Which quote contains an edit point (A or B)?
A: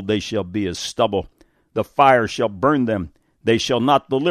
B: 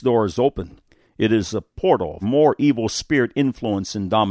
B